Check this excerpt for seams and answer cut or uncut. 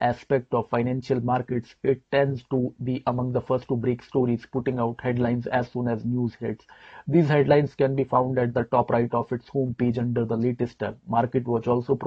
uncut